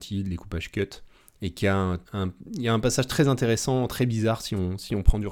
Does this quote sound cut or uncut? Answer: cut